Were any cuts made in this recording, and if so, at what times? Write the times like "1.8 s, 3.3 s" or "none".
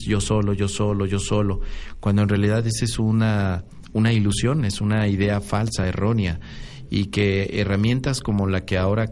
none

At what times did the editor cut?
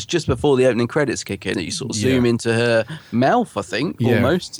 1.5 s

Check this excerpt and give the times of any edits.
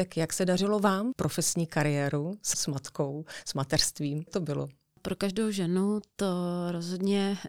1.1 s, 2.5 s, 4.3 s

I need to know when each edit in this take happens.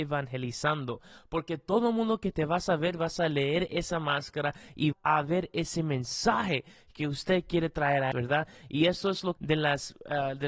4.9 s, 8.1 s, 9.4 s

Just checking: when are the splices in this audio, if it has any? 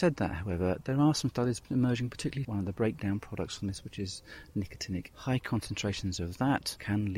2.4 s, 5.1 s

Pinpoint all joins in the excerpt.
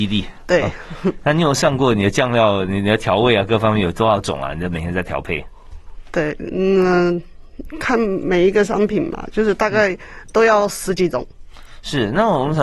none

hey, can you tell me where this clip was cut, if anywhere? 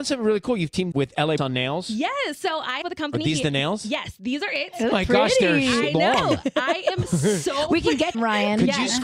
0.9 s, 1.4 s, 2.8 s, 4.9 s, 8.1 s

